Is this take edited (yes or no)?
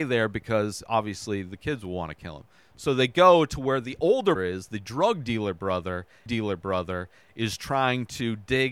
yes